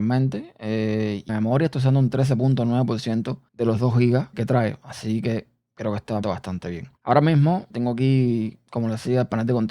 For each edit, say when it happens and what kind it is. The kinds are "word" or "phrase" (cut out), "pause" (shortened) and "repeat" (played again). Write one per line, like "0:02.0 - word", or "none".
0:01.3 - word
0:03.5 - pause
0:04.3 - word
0:06.2 - word
0:07.0 - pause
0:07.7 - word